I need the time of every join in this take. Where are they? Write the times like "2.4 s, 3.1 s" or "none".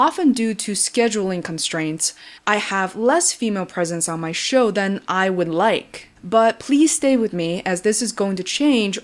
2.4 s, 6.2 s